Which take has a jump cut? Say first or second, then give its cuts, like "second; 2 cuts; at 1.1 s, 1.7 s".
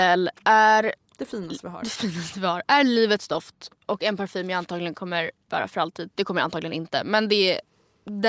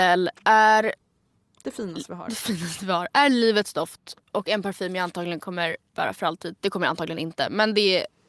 first; 1 cut; at 1.0 s